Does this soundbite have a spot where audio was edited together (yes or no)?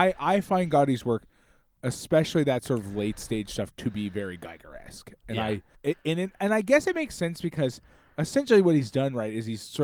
yes